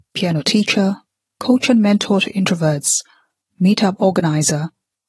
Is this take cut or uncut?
uncut